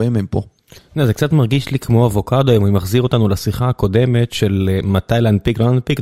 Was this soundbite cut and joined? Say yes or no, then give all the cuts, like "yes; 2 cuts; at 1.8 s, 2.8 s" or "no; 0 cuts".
no; 0 cuts